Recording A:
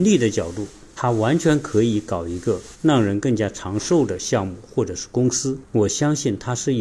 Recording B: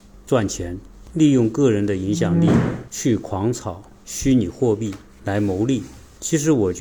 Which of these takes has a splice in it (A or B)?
A